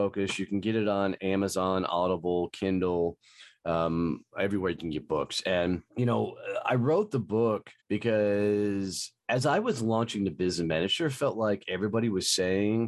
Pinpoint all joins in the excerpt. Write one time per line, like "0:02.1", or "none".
0:05.9
0:07.8